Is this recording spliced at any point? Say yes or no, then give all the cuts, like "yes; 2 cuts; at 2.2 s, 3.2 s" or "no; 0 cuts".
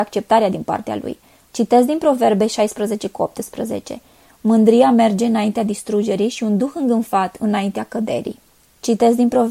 no; 0 cuts